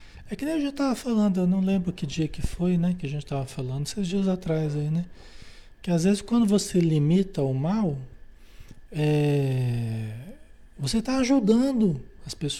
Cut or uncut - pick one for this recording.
uncut